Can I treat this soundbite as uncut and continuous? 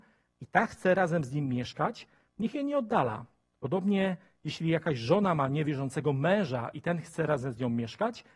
yes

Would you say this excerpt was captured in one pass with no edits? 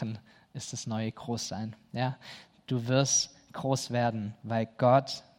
yes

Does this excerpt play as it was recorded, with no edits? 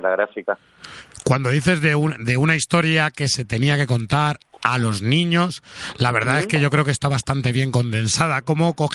no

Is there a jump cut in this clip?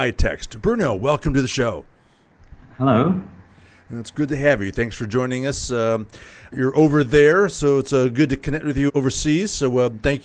no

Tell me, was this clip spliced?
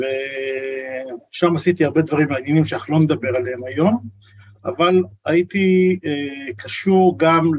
no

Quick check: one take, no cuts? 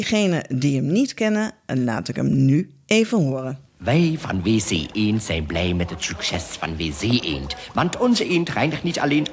no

